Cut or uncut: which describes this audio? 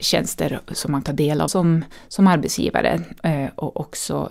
cut